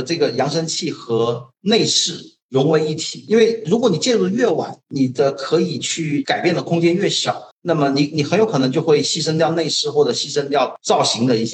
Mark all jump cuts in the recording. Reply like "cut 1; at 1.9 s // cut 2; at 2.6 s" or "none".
cut 1; at 7.5 s